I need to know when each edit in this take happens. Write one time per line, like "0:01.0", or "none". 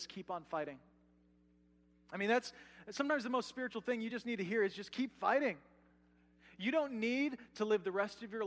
none